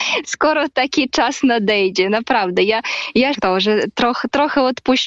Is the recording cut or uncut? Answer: cut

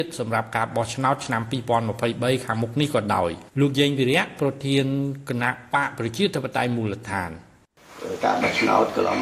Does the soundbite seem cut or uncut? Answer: cut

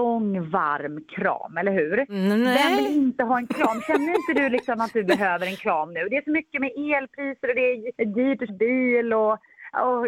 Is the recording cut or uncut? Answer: cut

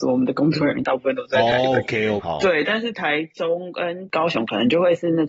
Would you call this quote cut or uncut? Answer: cut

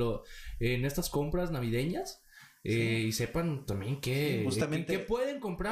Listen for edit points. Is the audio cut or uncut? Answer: uncut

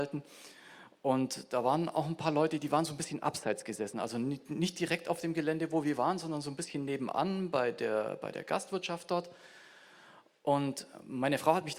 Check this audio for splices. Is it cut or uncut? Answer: uncut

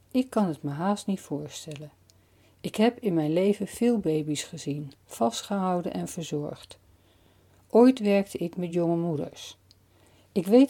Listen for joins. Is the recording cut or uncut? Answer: uncut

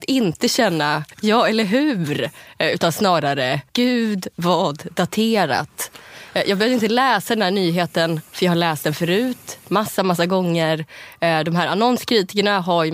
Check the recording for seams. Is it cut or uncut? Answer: cut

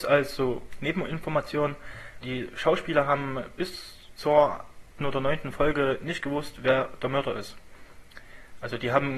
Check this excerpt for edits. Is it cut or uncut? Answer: cut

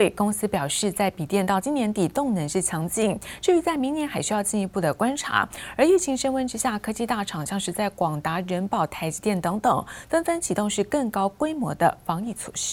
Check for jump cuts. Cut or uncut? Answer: uncut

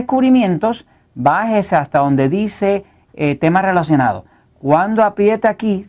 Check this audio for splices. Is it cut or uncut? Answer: uncut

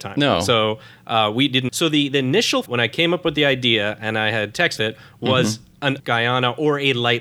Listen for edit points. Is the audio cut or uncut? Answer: cut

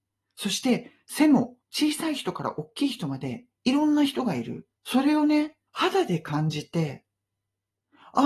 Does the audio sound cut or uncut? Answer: cut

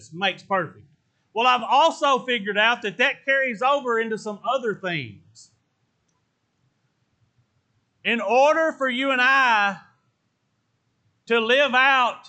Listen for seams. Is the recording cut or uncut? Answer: uncut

